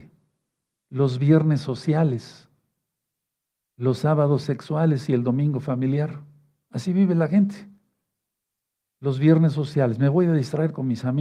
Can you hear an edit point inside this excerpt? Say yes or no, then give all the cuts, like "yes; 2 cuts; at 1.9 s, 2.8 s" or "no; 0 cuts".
no; 0 cuts